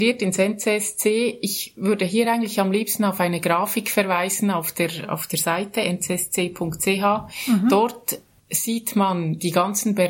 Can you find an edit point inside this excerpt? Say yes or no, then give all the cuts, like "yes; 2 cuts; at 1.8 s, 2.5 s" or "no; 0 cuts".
no; 0 cuts